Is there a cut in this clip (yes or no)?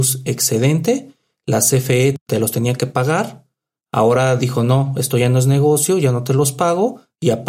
no